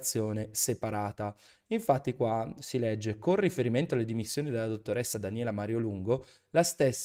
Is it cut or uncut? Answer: uncut